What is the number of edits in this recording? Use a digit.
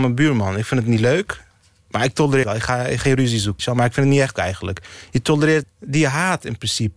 5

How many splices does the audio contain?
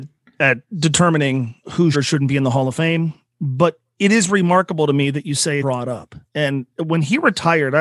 5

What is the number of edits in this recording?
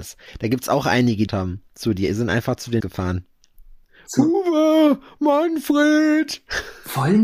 2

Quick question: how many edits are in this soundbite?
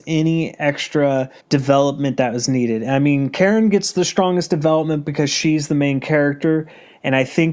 1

